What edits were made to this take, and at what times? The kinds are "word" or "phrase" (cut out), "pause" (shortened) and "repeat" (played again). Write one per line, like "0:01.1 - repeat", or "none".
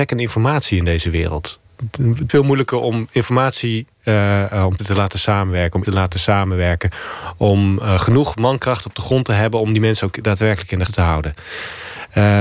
0:02.3 - word
0:04.8 - word
0:05.8 - word
0:10.9 - word